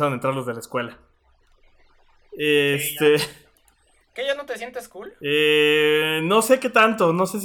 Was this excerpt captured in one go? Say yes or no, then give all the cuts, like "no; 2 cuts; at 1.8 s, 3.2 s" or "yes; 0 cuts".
yes; 0 cuts